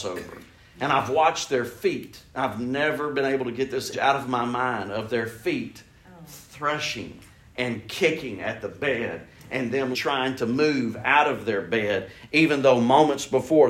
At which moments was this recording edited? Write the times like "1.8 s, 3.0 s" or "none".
3.9 s, 9.9 s